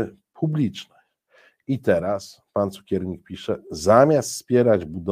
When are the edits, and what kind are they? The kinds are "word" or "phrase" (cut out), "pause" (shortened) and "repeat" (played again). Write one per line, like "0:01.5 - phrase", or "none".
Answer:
none

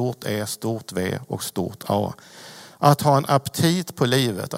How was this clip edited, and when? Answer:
none

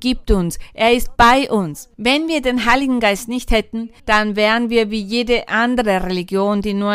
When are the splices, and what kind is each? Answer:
0:01.9 - pause
0:04.0 - pause

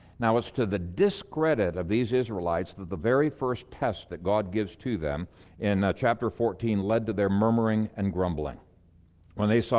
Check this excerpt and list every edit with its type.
0:05.5 - pause

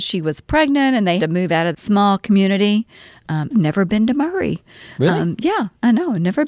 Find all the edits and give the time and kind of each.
0:01.2 - word
0:01.7 - word
0:03.5 - word

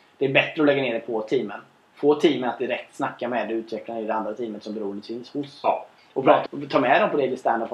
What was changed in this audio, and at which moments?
0:06.5 - word

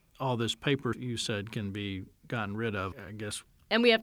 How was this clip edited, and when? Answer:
0:00.9 - word
0:02.9 - word

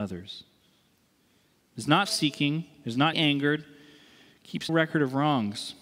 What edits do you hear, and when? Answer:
0:02.0 - word
0:03.1 - word
0:04.7 - word

